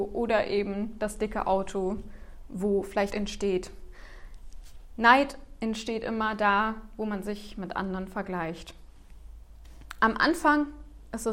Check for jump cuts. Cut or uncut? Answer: cut